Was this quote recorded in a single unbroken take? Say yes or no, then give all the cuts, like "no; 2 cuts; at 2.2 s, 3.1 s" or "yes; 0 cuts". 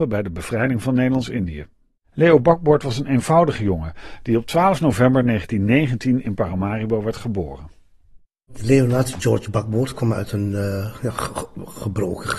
no; 1 cut; at 2.0 s